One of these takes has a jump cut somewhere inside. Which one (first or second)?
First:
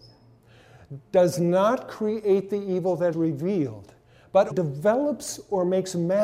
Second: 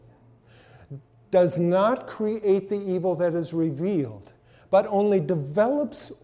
first